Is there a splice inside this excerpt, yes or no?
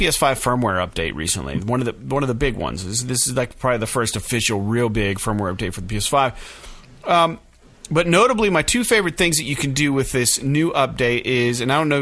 no